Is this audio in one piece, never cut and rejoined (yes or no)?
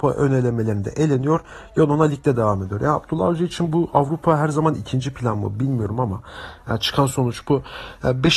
yes